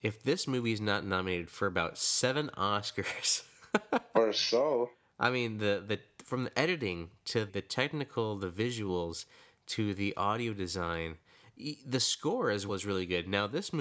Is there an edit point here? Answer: yes; 2 cuts; at 7.5 s, 12.7 s

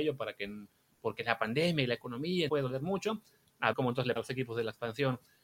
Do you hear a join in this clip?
yes; 3 cuts; at 2.5 s, 3.7 s, 4.2 s

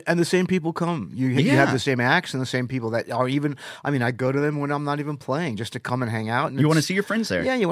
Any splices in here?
no; 0 cuts

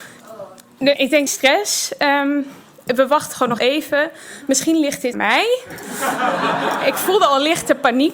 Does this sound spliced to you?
yes; 4 cuts; at 1.0 s, 1.3 s, 3.6 s, 5.1 s

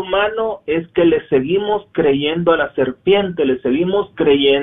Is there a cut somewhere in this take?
no; 0 cuts

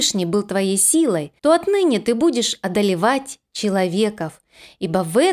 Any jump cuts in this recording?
yes; 1 cut; at 1.4 s

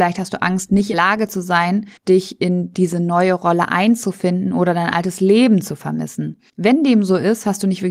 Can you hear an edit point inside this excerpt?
yes; 2 cuts; at 0.9 s, 2.0 s

